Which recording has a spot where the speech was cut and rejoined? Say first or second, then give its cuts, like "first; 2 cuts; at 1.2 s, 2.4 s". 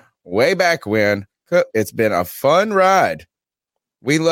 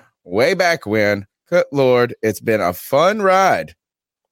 first; 1 cut; at 1.7 s